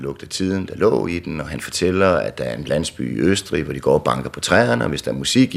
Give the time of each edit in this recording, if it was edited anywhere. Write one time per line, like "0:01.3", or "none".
none